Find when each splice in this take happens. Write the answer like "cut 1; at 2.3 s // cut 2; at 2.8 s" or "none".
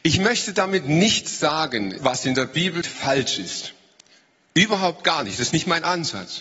cut 1; at 2.0 s // cut 2; at 2.8 s